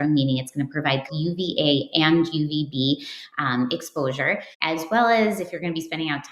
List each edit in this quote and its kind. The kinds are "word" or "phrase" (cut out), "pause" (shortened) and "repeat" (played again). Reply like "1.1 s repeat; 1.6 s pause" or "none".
1.1 s phrase; 4.5 s pause